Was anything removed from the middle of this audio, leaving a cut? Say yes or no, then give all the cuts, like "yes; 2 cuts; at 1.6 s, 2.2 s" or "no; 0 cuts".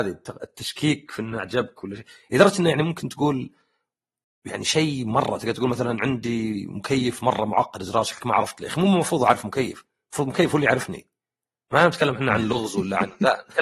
no; 0 cuts